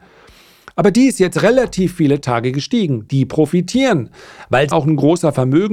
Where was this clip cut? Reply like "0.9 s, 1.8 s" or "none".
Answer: 4.7 s

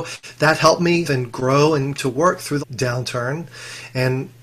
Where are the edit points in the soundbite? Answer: 1.0 s, 1.9 s, 2.6 s

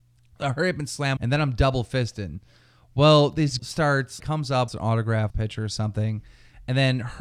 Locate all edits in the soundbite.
1.2 s, 3.6 s, 4.2 s, 4.7 s, 5.3 s

